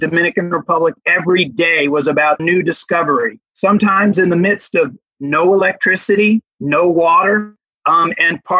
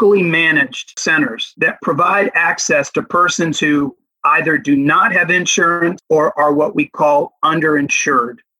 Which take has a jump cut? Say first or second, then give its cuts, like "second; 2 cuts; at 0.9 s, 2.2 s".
first; 3 cuts; at 2.4 s, 3.4 s, 6.5 s